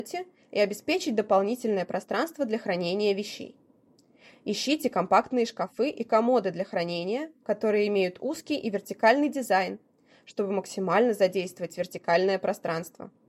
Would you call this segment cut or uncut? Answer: uncut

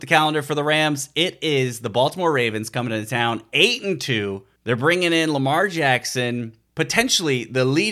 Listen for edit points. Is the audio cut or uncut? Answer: uncut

